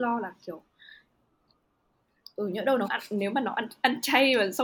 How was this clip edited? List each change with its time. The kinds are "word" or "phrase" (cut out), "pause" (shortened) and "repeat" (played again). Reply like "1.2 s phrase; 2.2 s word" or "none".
2.9 s word